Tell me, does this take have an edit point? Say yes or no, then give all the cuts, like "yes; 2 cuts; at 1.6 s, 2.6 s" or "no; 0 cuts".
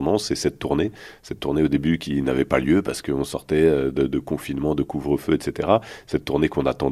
no; 0 cuts